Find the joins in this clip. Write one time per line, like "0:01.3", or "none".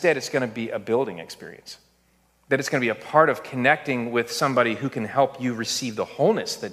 none

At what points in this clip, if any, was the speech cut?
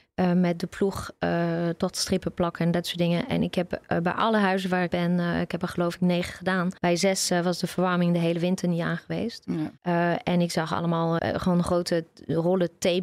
0:04.9
0:06.8
0:09.8
0:11.2

